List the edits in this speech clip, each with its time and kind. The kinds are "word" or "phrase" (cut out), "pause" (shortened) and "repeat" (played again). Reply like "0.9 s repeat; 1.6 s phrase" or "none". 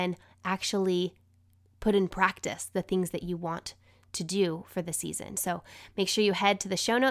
none